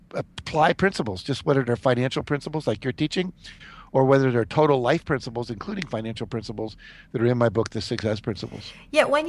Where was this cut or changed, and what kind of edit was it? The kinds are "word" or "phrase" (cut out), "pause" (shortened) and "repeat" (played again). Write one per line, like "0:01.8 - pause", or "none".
none